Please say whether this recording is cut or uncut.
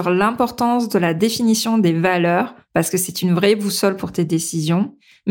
uncut